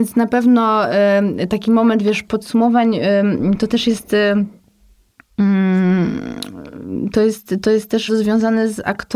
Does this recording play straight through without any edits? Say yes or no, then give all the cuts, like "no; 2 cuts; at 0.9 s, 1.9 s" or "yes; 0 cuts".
no; 1 cut; at 8.1 s